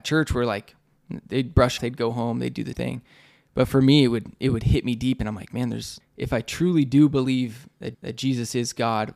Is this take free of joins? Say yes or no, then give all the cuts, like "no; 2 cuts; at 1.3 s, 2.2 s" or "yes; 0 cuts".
no; 4 cuts; at 1.8 s, 2.7 s, 6.0 s, 7.9 s